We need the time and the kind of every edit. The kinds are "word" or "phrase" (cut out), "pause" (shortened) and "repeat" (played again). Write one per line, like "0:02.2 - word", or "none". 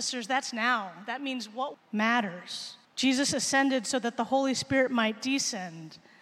0:01.7 - phrase
0:02.8 - pause